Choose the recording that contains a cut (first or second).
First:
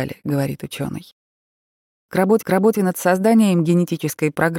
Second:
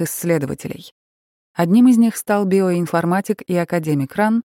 first